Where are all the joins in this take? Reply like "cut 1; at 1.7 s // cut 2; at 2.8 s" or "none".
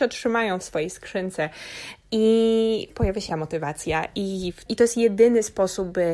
cut 1; at 2.9 s // cut 2; at 3.3 s // cut 3; at 4.7 s